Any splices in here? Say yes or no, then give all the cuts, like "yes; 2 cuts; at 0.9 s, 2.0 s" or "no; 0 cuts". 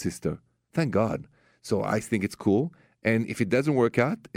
no; 0 cuts